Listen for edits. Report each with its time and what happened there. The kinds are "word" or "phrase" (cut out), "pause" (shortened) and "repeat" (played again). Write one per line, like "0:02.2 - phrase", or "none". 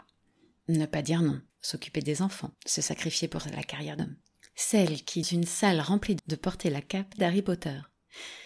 0:01.5 - pause
0:02.5 - pause
0:04.0 - word
0:05.2 - word
0:06.2 - phrase
0:07.2 - word